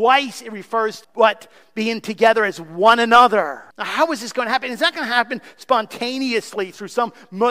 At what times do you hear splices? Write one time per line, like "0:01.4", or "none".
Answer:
0:01.0
0:03.7

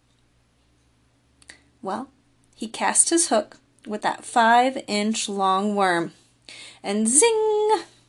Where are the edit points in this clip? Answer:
none

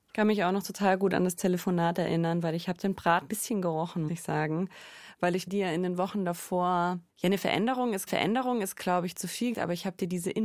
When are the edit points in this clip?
0:03.3
0:04.1
0:05.5
0:07.1
0:08.1
0:09.5

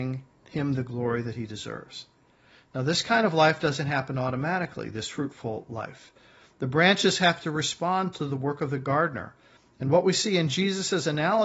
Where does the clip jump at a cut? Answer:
none

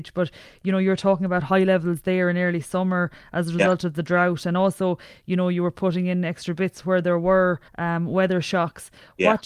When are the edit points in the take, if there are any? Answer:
0:07.7

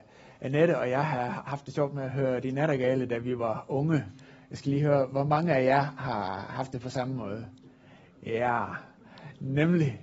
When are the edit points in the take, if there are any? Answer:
none

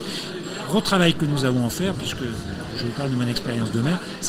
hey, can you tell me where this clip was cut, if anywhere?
0:02.7

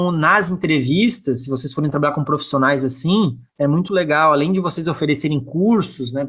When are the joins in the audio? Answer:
0:03.5

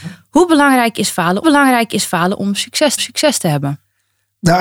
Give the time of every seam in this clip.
0:01.4
0:03.0

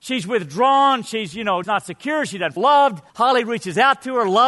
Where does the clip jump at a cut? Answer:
0:01.6
0:02.6
0:03.1

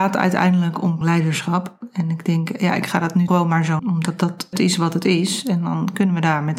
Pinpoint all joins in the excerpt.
0:01.0
0:03.3
0:03.8
0:04.5

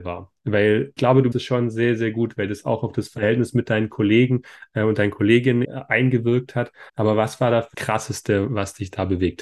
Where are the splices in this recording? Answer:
0:01.0
0:01.3
0:05.6
0:06.9
0:07.7

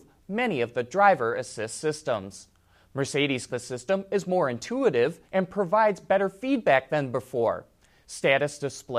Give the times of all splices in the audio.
0:03.5
0:05.2

